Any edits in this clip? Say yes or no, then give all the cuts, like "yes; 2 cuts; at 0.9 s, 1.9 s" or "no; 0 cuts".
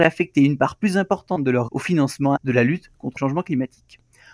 yes; 3 cuts; at 1.7 s, 2.4 s, 3.2 s